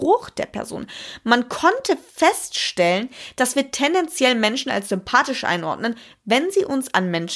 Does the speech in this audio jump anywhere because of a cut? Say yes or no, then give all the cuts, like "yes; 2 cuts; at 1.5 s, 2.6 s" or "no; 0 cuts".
no; 0 cuts